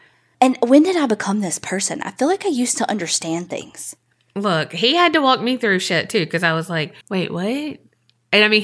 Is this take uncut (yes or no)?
no